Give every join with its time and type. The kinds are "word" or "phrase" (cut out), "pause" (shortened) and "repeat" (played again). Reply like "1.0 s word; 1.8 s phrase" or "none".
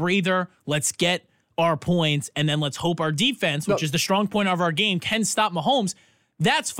none